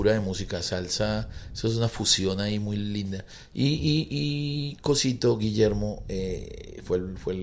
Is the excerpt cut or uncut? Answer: uncut